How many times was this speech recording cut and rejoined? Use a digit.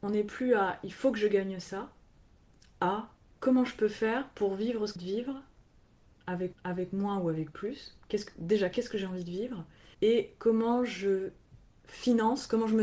4